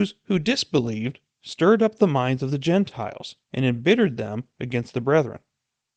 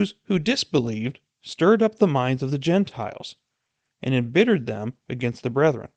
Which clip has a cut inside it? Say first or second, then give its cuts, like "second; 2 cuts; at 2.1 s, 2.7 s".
first; 1 cut; at 3.4 s